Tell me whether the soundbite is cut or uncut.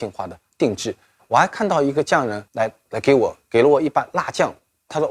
cut